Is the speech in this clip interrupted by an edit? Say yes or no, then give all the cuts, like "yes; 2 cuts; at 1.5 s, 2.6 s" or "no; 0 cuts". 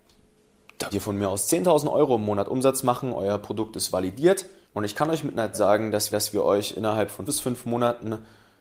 yes; 5 cuts; at 0.9 s, 4.6 s, 5.5 s, 6.1 s, 7.3 s